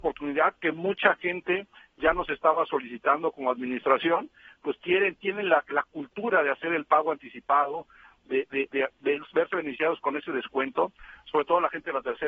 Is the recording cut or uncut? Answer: uncut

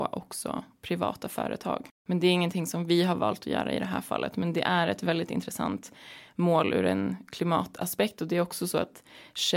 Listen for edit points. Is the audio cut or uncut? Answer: uncut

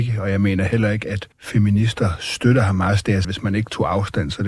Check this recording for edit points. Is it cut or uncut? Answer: cut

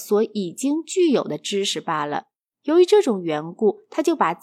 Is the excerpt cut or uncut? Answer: uncut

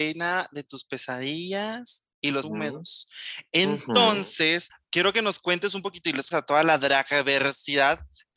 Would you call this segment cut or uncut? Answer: cut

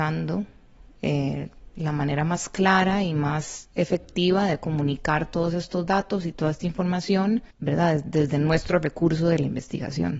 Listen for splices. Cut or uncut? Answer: cut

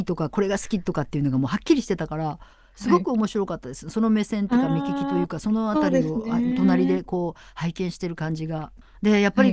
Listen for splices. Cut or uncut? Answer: uncut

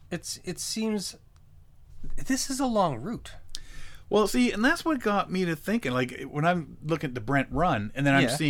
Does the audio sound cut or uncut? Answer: uncut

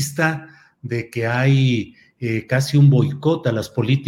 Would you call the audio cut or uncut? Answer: uncut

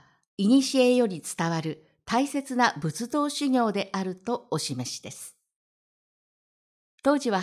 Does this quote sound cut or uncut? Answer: uncut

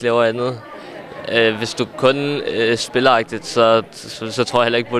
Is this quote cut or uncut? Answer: uncut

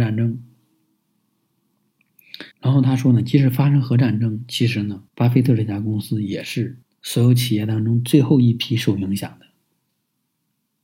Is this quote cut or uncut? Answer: cut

